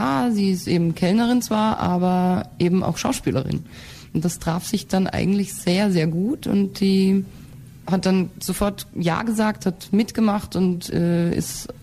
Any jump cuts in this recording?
no; 0 cuts

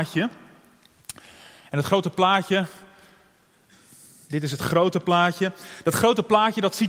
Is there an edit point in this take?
no; 0 cuts

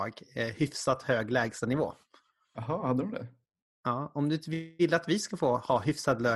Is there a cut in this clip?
no; 0 cuts

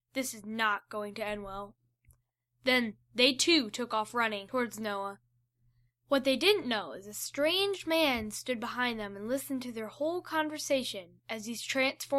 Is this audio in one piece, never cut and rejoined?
yes; 0 cuts

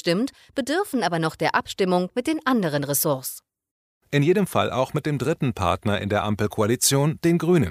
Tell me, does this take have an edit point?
no; 0 cuts

